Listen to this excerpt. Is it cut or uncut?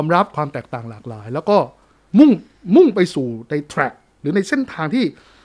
uncut